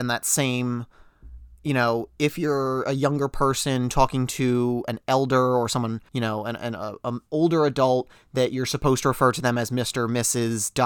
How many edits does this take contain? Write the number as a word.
two